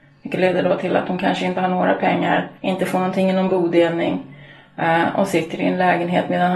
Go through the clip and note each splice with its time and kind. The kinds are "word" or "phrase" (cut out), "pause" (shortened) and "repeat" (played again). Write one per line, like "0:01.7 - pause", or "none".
0:02.6 - pause